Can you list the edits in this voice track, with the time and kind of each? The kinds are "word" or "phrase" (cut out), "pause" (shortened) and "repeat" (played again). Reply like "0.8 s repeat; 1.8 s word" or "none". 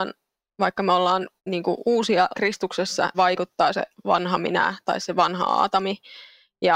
1.4 s pause; 2.3 s word; 3.1 s phrase